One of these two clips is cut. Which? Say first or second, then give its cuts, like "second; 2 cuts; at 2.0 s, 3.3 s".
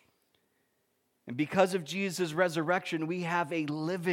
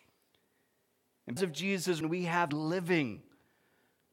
second; 3 cuts; at 1.4 s, 2.0 s, 2.5 s